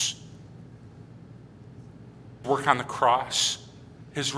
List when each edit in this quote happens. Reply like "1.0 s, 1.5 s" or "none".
2.4 s